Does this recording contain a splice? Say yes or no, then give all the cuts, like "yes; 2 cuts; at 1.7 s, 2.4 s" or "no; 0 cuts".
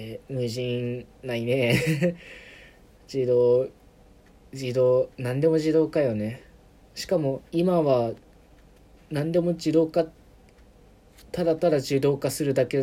yes; 3 cuts; at 1.1 s, 5.1 s, 7.5 s